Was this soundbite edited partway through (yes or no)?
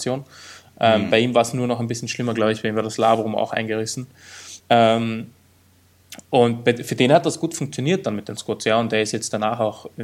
yes